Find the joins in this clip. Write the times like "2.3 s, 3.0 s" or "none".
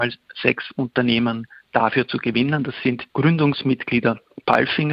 3.1 s